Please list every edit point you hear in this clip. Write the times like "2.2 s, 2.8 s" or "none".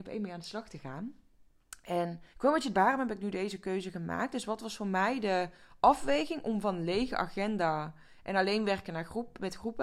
2.3 s, 2.7 s

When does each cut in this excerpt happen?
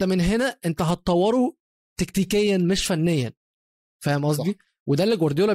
none

